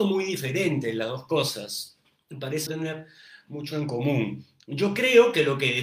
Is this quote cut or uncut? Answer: cut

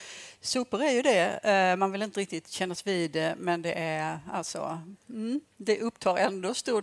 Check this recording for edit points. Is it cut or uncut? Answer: uncut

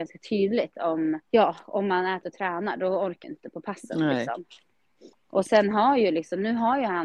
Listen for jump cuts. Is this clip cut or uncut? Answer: cut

